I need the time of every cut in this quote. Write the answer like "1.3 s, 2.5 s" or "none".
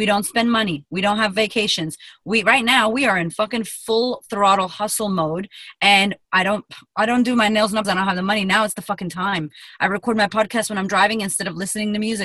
7.8 s